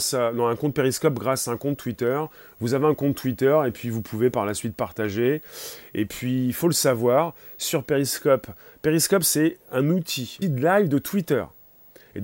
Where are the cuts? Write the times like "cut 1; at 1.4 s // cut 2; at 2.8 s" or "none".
cut 1; at 10.4 s